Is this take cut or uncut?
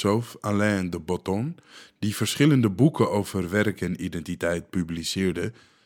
uncut